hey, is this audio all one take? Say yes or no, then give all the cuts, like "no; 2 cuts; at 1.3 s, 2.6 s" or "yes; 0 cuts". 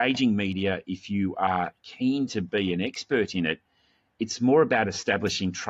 yes; 0 cuts